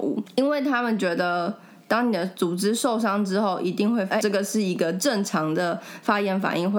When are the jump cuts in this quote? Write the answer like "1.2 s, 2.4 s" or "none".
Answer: 4.2 s